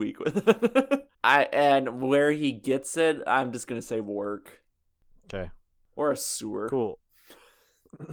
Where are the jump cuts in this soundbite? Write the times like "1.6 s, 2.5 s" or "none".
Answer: 1.1 s